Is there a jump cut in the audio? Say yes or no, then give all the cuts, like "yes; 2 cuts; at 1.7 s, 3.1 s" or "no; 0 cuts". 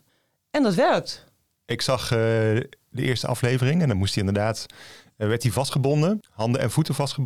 no; 0 cuts